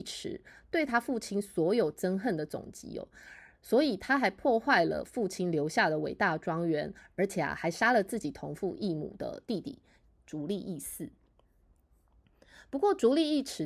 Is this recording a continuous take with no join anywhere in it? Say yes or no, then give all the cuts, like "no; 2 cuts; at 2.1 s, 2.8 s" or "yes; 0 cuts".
yes; 0 cuts